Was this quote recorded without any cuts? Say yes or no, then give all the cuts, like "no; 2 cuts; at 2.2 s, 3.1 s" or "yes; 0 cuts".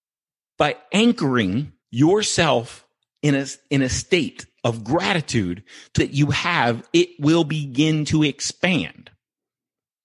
no; 2 cuts; at 1.8 s, 6.0 s